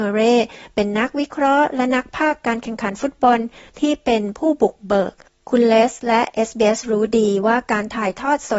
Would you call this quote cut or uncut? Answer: uncut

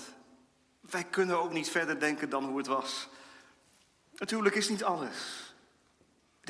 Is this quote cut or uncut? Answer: uncut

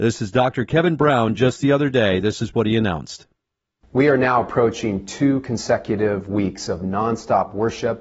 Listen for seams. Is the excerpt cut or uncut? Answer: uncut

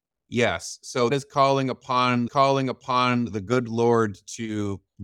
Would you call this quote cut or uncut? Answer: cut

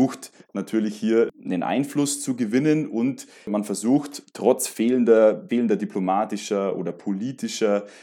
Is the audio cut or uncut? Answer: cut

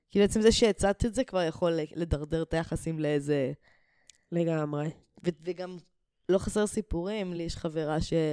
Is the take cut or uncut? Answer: uncut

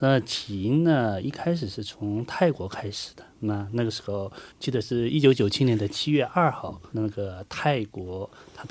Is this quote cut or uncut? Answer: cut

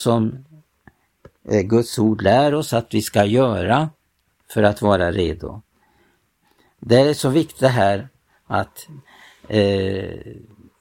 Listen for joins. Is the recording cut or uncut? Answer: uncut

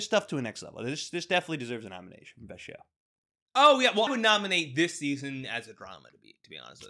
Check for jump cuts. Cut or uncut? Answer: cut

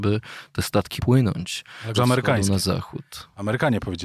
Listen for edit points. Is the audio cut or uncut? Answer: cut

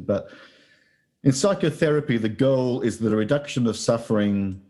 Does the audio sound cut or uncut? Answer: uncut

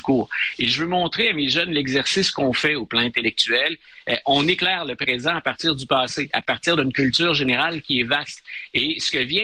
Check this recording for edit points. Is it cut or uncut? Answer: uncut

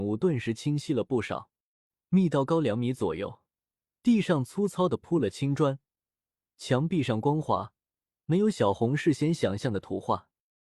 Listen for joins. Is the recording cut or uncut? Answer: uncut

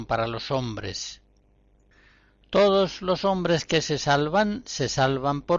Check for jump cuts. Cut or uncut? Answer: uncut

